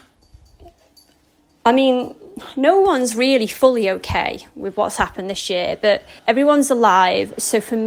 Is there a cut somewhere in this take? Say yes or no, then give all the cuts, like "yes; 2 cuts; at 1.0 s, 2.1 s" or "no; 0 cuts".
yes; 1 cut; at 6.2 s